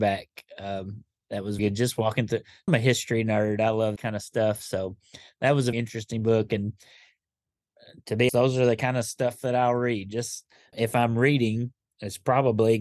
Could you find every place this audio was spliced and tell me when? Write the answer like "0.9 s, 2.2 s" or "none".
1.6 s, 2.7 s, 4.0 s, 5.7 s, 8.3 s, 10.7 s